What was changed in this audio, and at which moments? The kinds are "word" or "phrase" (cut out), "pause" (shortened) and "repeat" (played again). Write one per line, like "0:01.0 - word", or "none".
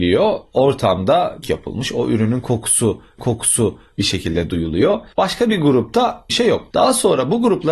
0:01.4 - word
0:03.2 - repeat
0:06.3 - phrase